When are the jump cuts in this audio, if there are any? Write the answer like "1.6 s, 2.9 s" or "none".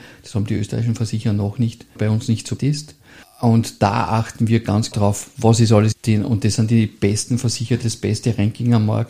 2.0 s, 2.6 s, 3.2 s, 4.9 s, 5.9 s, 7.8 s

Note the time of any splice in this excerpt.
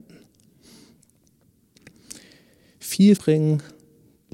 3.2 s

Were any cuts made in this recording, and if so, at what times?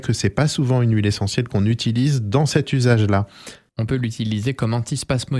none

